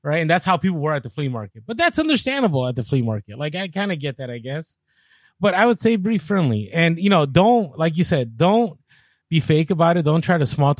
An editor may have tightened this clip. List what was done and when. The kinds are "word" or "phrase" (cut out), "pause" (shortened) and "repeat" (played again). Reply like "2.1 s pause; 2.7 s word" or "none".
none